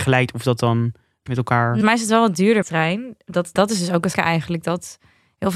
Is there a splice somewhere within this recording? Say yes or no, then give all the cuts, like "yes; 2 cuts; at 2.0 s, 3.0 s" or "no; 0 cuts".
yes; 5 cuts; at 1.3 s, 1.8 s, 2.6 s, 3.6 s, 4.1 s